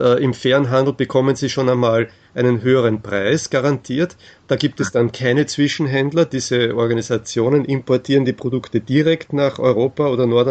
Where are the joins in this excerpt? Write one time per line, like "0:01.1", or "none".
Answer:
none